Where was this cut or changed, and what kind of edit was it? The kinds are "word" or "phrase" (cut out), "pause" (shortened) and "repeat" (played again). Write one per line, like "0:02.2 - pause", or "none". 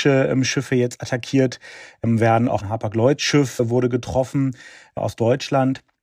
none